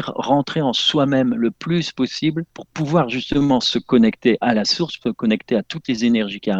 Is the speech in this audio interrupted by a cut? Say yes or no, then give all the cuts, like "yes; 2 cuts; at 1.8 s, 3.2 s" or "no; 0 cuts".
yes; 1 cut; at 2.5 s